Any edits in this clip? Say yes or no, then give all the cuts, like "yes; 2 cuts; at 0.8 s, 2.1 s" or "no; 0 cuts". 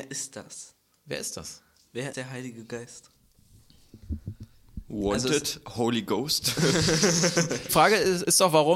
yes; 2 cuts; at 2.1 s, 7.7 s